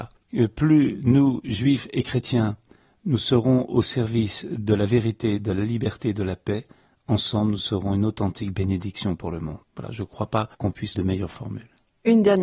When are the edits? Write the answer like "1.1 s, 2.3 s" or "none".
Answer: 10.5 s, 10.9 s